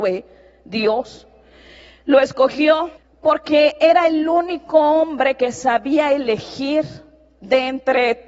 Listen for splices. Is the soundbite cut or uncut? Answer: cut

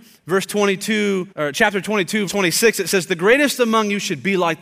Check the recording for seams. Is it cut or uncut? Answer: cut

